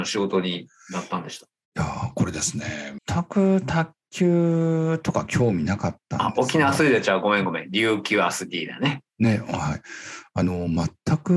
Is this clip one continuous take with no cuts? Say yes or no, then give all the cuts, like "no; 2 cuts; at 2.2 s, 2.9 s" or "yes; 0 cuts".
no; 1 cut; at 3.0 s